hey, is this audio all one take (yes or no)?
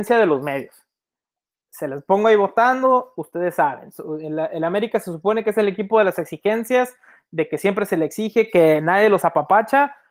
yes